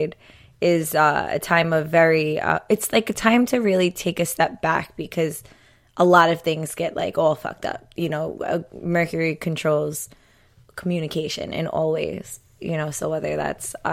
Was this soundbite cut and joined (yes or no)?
no